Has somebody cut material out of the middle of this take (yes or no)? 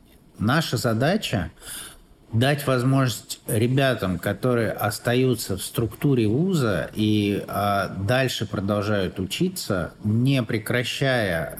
no